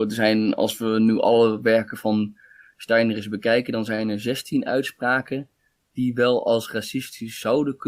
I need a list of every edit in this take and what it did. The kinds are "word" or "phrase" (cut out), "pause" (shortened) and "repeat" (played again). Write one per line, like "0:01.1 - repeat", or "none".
none